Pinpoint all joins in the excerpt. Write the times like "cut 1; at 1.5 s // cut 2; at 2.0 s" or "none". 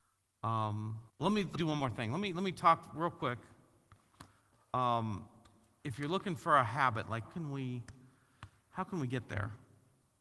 cut 1; at 1.1 s // cut 2; at 1.6 s // cut 3; at 7.2 s